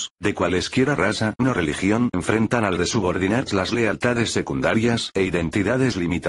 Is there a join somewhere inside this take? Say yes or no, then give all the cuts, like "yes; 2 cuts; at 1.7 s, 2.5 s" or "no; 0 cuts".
yes; 4 cuts; at 1.4 s, 2.1 s, 2.8 s, 3.5 s